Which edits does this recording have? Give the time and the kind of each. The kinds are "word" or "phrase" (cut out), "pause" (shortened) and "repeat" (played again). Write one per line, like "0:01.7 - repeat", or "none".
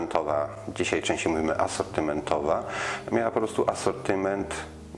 none